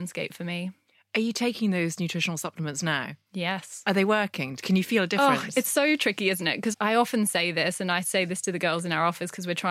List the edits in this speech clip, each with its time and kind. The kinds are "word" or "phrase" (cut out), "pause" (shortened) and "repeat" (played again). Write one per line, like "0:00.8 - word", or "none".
0:06.7 - word